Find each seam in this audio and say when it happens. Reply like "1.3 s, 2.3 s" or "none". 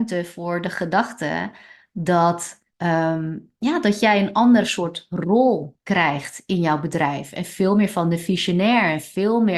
2.7 s